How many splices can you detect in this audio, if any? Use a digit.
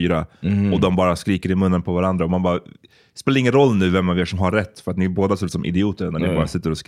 0